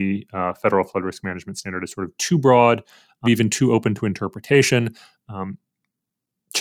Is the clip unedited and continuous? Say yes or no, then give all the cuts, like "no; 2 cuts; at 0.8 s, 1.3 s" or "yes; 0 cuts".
no; 1 cut; at 3.2 s